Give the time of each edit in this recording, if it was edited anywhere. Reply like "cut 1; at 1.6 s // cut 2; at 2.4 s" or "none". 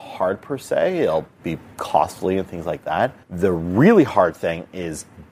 cut 1; at 3.2 s